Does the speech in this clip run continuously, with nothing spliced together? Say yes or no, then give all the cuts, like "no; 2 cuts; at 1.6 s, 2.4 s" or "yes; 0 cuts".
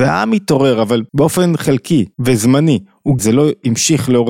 no; 3 cuts; at 1.1 s, 2.1 s, 3.2 s